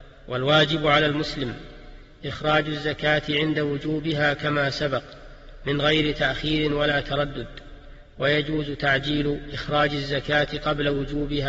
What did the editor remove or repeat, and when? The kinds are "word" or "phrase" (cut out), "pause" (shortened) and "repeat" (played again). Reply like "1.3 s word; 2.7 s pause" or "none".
none